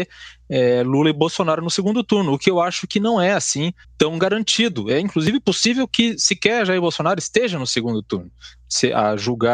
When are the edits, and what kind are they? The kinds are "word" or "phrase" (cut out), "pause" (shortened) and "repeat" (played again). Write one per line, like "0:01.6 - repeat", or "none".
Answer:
0:03.8 - pause